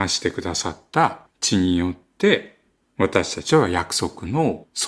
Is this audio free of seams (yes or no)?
yes